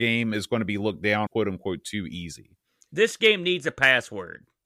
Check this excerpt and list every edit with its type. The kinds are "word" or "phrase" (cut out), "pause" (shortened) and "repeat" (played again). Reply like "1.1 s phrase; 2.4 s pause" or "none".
1.3 s phrase